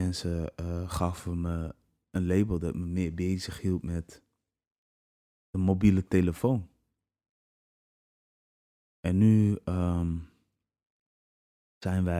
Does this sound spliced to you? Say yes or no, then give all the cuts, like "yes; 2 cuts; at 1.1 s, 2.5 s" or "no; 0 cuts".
no; 0 cuts